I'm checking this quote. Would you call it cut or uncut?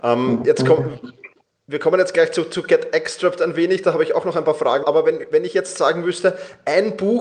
cut